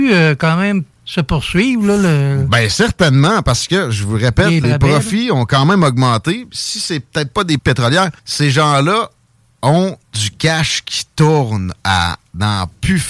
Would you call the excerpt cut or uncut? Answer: cut